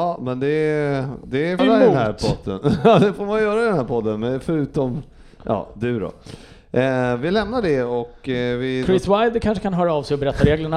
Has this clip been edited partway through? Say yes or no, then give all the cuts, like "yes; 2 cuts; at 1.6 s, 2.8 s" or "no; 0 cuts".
yes; 1 cut; at 1.6 s